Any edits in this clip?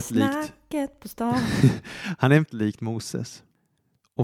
yes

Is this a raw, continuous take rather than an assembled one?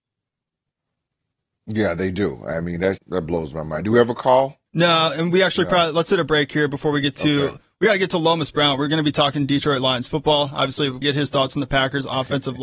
no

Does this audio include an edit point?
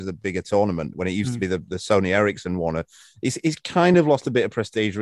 no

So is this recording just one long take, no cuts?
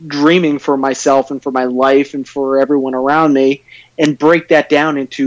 yes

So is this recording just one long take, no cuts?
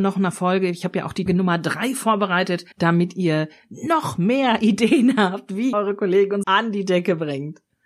no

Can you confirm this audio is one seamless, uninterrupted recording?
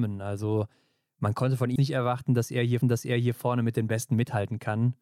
no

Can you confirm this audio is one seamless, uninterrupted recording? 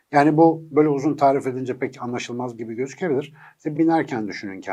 no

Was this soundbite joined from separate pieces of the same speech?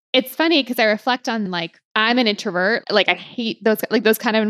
yes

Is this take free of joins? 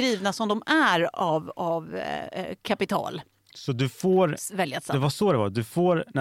yes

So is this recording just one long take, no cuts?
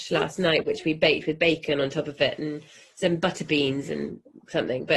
yes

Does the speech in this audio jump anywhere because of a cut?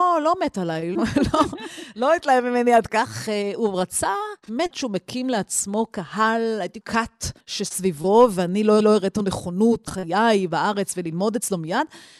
yes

